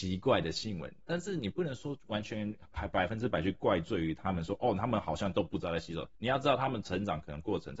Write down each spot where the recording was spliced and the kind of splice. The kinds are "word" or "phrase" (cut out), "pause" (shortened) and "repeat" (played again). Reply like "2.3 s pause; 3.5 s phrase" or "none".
6.1 s pause